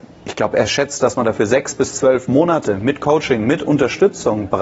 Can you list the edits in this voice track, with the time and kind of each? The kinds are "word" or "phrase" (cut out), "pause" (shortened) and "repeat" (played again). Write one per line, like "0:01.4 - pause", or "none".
none